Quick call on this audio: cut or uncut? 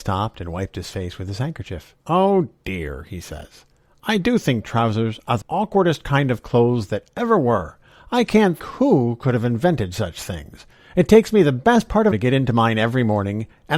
cut